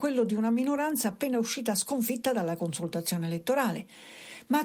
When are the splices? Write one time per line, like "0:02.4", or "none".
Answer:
none